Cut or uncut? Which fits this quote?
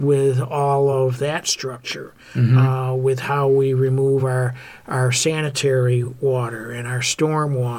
uncut